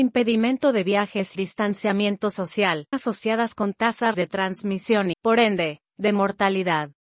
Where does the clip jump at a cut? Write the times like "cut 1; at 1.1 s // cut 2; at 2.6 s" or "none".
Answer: cut 1; at 1.3 s // cut 2; at 2.9 s // cut 3; at 4.1 s // cut 4; at 5.1 s

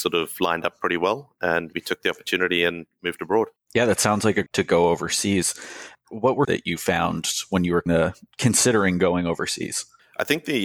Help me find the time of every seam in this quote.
cut 1; at 1.7 s // cut 2; at 3.6 s // cut 3; at 4.5 s // cut 4; at 6.4 s // cut 5; at 7.9 s

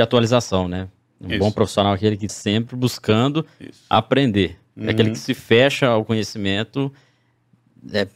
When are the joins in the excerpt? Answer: cut 1; at 2.3 s

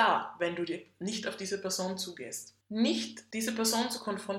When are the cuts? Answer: none

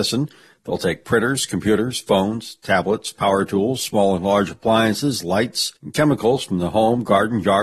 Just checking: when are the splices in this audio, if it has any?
cut 1; at 5.8 s

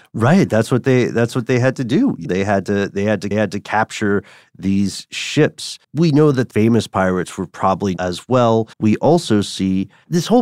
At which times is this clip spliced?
cut 1; at 2.2 s // cut 2; at 3.3 s // cut 3; at 5.8 s // cut 4; at 6.5 s // cut 5; at 8.0 s // cut 6; at 8.7 s

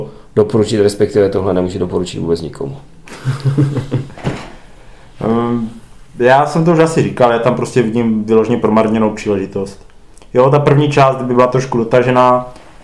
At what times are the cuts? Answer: none

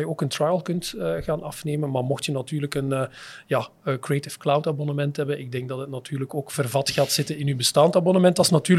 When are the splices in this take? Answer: none

